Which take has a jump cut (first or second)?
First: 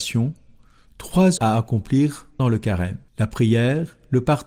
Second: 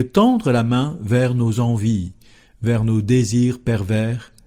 first